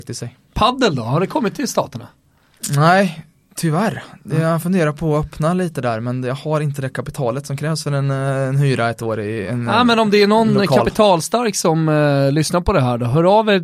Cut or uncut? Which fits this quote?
uncut